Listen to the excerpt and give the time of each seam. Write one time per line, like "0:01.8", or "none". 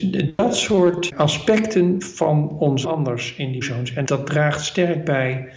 0:01.1
0:02.8
0:03.6
0:04.0